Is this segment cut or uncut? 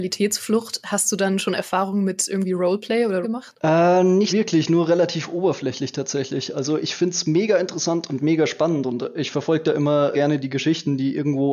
cut